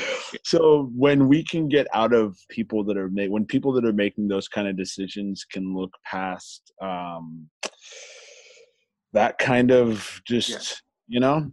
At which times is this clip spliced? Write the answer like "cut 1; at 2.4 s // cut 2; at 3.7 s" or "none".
cut 1; at 2.5 s